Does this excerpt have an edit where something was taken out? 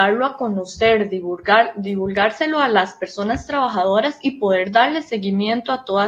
no; 0 cuts

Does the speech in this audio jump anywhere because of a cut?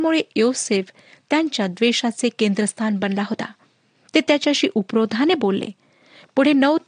no; 0 cuts

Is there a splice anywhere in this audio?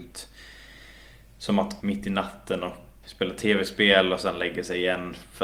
yes; 2 cuts; at 1.8 s, 3.0 s

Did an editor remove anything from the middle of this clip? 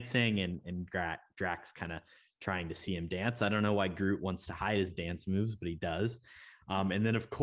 no; 0 cuts

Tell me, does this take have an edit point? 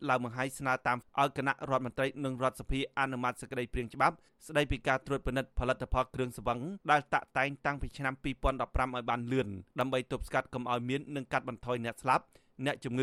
yes; 3 cuts; at 1.0 s, 6.8 s, 9.7 s

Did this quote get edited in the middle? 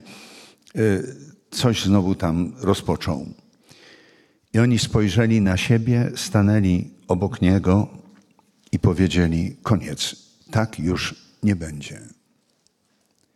no; 0 cuts

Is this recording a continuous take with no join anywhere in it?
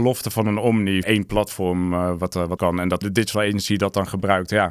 no; 3 cuts; at 1.0 s, 2.6 s, 3.0 s

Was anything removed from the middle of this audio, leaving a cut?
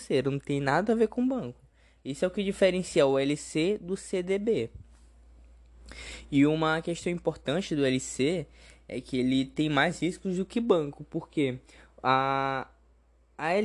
no; 0 cuts

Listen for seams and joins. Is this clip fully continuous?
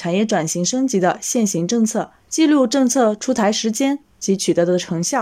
no; 1 cut; at 2.2 s

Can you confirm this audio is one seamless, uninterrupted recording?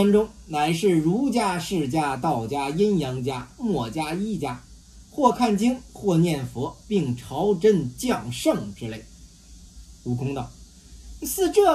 yes; 0 cuts

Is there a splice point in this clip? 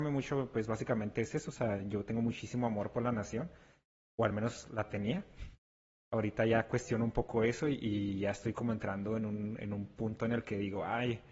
no; 0 cuts

